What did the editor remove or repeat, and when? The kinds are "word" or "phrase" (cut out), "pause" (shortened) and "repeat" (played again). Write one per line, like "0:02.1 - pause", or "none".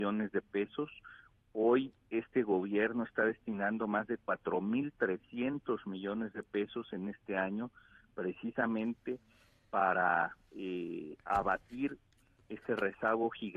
0:02.0 - pause